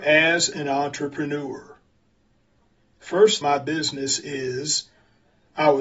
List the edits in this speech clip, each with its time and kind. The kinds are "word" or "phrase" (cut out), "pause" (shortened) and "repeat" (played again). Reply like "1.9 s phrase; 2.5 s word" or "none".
3.4 s phrase